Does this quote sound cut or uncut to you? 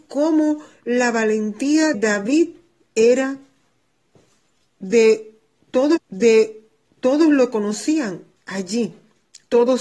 cut